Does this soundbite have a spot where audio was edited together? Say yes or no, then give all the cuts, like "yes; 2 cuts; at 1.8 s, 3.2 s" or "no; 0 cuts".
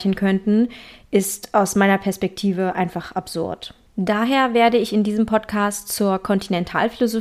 no; 0 cuts